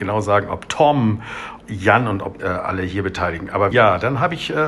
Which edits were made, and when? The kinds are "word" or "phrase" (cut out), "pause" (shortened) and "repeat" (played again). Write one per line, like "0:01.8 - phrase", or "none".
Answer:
0:01.6 - word
0:02.4 - phrase
0:03.7 - word